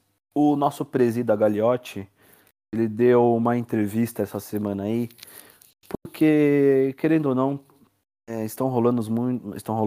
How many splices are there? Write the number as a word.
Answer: zero